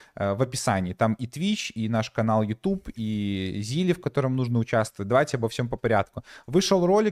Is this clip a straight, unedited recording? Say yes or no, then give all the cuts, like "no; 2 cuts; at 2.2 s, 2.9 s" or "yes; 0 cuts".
yes; 0 cuts